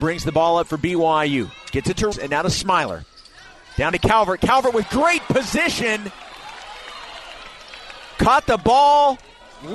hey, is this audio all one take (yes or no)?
no